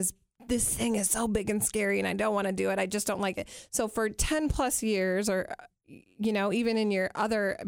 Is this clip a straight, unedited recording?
yes; 0 cuts

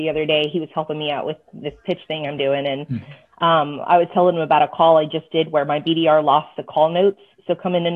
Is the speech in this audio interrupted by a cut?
no; 0 cuts

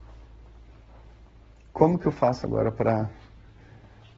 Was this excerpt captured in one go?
yes; 0 cuts

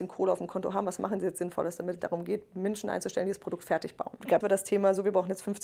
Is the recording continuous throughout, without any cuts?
no; 2 cuts; at 2.0 s, 4.4 s

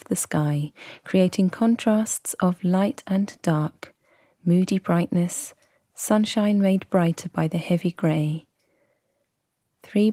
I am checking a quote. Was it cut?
no; 0 cuts

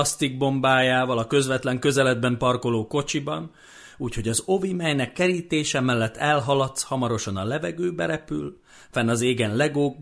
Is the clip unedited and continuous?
yes; 0 cuts

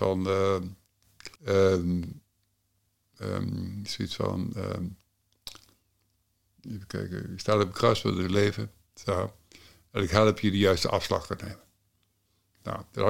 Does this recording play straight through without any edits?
no; 1 cut; at 1.4 s

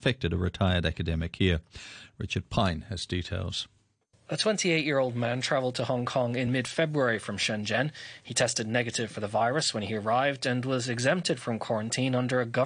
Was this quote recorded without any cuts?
yes; 0 cuts

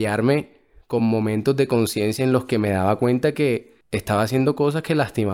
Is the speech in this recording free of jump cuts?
yes; 0 cuts

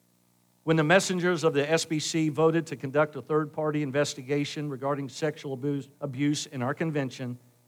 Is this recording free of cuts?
no; 1 cut; at 5.9 s

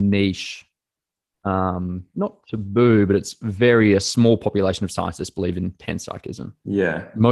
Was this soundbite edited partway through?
no; 0 cuts

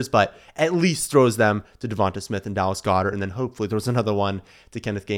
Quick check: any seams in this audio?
no; 0 cuts

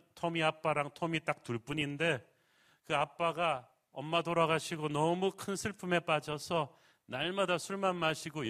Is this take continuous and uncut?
yes; 0 cuts

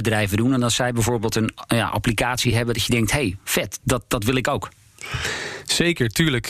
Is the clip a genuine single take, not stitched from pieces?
yes; 0 cuts

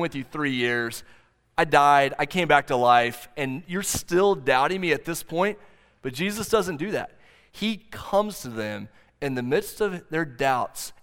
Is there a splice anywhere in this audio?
no; 0 cuts

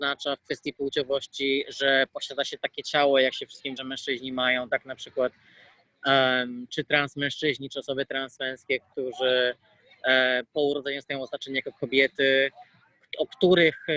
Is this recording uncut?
no; 2 cuts; at 3.8 s, 6.7 s

